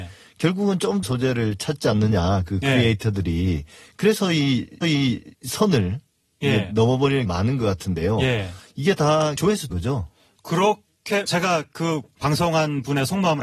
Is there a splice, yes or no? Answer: yes